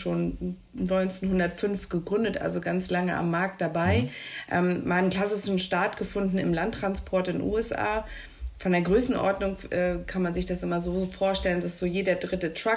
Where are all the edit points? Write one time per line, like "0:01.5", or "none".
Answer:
none